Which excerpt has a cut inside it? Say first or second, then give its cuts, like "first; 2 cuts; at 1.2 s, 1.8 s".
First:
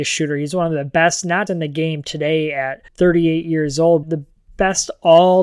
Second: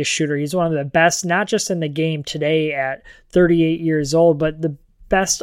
first; 3 cuts; at 1.5 s, 2.9 s, 4.0 s